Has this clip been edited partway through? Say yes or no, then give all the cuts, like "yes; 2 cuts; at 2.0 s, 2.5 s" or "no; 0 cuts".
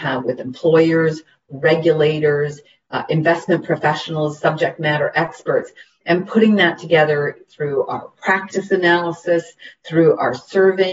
no; 0 cuts